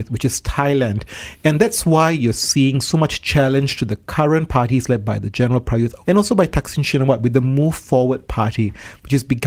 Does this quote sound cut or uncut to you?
cut